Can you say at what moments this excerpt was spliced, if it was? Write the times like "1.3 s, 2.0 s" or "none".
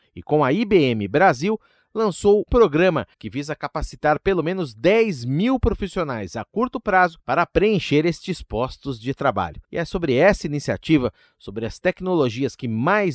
2.5 s, 3.1 s, 9.6 s